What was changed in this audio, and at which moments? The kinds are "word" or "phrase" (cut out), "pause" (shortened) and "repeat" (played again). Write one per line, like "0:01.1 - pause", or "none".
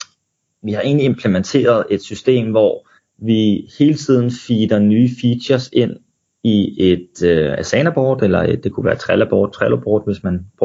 0:03.0 - pause